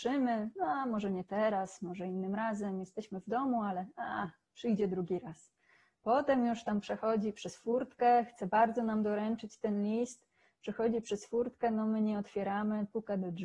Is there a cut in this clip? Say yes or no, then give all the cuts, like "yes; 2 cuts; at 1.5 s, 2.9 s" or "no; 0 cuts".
no; 0 cuts